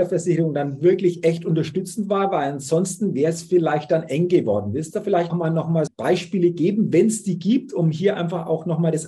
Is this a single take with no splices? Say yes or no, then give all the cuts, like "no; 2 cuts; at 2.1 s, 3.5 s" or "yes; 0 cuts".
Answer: no; 2 cuts; at 5.3 s, 5.9 s